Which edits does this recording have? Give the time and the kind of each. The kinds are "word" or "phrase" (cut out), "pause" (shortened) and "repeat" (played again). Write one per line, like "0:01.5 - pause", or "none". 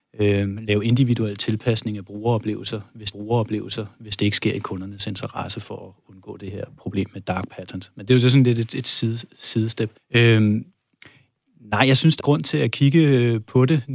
0:03.1 - repeat
0:10.0 - pause
0:12.2 - word